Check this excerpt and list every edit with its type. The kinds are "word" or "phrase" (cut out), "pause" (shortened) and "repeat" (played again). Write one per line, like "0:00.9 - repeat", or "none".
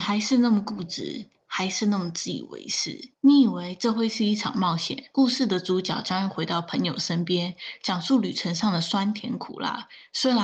0:03.1 - pause